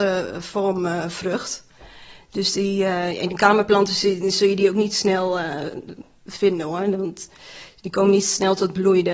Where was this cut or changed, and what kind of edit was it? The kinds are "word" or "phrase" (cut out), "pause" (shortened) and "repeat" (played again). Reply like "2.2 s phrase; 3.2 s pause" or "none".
none

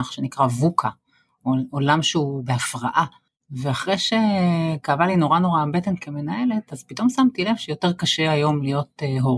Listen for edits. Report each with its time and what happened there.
none

